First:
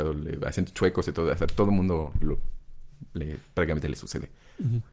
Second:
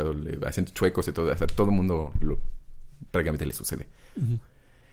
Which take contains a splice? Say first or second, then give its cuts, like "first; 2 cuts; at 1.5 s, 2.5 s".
second; 1 cut; at 3.1 s